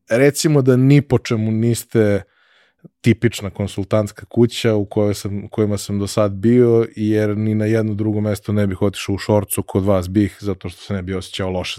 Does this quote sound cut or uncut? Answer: uncut